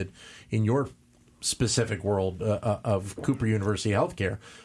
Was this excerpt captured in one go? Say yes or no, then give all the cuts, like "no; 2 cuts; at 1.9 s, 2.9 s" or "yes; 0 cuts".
yes; 0 cuts